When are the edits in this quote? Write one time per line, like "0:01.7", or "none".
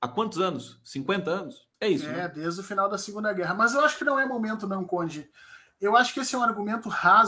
0:01.7